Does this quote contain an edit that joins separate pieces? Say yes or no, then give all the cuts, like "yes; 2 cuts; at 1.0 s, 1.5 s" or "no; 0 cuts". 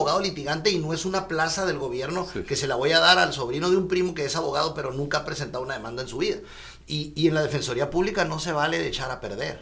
no; 0 cuts